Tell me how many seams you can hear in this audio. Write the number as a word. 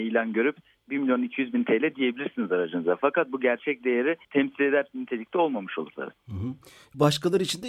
one